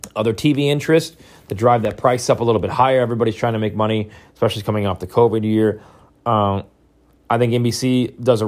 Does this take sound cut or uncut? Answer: uncut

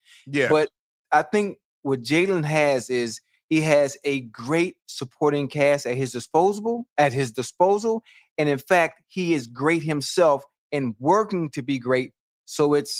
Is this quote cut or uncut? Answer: uncut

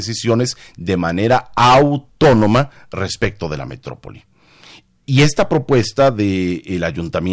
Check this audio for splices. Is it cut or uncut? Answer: uncut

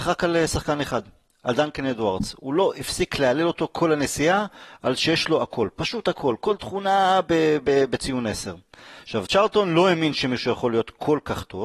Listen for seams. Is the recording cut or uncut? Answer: uncut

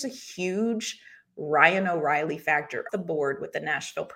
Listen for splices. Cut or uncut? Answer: cut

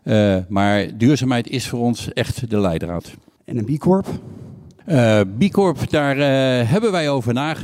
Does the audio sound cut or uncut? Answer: uncut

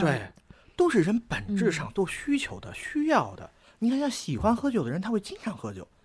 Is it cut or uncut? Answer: uncut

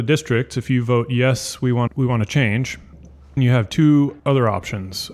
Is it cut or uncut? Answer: cut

